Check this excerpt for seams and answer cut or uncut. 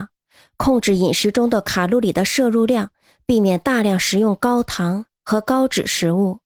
uncut